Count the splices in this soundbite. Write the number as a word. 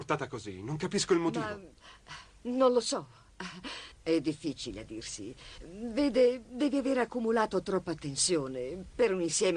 one